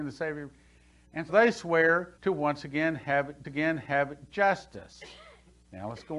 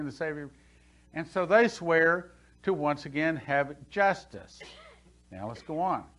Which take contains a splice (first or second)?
first